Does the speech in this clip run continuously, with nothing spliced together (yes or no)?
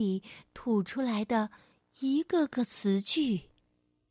yes